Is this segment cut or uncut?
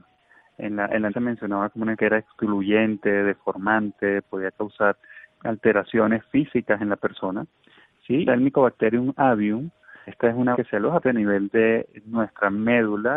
cut